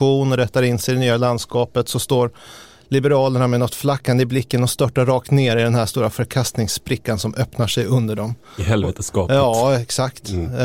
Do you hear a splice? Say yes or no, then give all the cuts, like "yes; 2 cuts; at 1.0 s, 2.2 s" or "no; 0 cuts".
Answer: no; 0 cuts